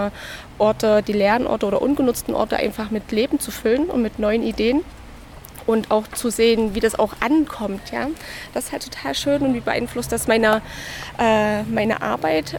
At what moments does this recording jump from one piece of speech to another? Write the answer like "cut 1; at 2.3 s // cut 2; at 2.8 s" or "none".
none